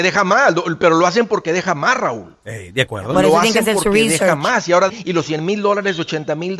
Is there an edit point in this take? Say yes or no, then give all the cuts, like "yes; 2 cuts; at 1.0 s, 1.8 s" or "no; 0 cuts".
yes; 1 cut; at 4.9 s